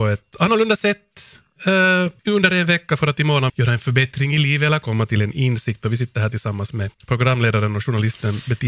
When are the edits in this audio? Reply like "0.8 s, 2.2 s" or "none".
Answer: 2.2 s, 3.5 s, 6.9 s